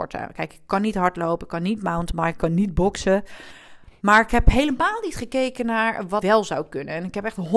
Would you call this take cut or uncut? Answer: cut